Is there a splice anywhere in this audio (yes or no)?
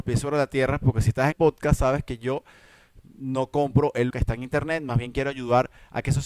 yes